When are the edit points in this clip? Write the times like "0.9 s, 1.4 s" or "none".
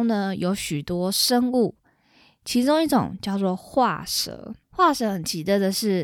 4.6 s